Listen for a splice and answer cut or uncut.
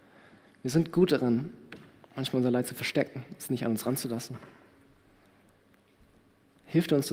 uncut